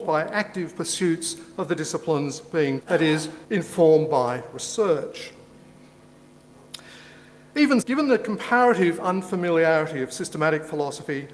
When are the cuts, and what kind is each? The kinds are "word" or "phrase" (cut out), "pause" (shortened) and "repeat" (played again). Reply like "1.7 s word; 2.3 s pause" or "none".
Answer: 2.8 s word; 3.4 s word; 7.8 s word